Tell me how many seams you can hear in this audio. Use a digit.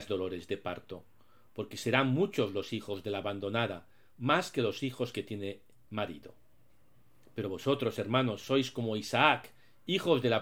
0